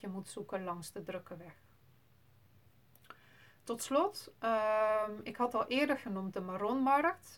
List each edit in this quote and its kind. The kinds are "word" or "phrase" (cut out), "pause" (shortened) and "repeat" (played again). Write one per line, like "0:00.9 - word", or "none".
none